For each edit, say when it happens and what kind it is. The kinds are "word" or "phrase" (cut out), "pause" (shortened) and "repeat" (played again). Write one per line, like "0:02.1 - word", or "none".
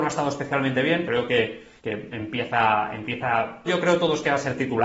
0:01.1 - phrase
0:01.8 - pause
0:03.7 - word